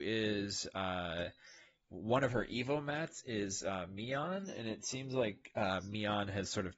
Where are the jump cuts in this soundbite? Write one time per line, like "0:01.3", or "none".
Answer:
none